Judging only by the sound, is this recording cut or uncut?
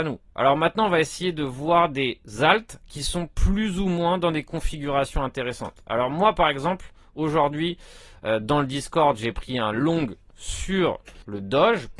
uncut